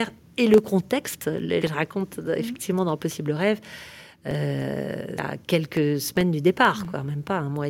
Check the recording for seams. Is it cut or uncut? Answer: cut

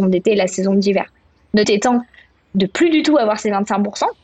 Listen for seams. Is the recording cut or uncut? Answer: cut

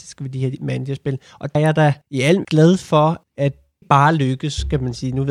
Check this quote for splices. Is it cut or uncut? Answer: cut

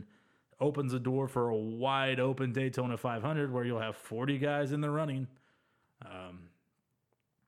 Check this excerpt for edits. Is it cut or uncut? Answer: uncut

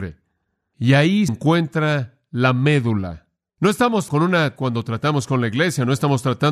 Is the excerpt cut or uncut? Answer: cut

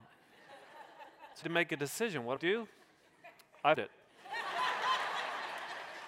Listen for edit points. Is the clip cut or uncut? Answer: cut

